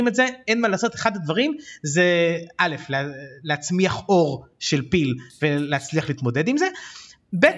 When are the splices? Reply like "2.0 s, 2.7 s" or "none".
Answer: none